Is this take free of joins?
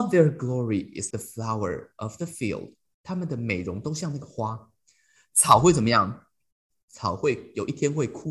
no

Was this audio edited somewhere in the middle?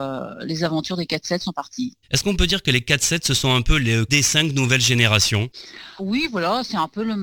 yes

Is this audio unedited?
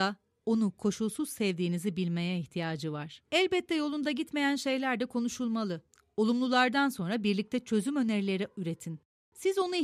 yes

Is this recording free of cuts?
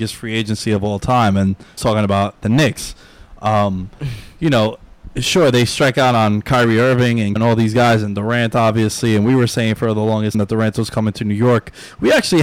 no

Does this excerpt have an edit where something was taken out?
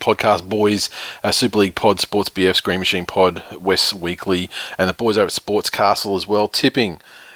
no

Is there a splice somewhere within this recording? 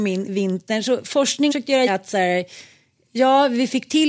yes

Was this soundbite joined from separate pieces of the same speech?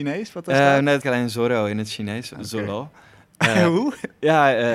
yes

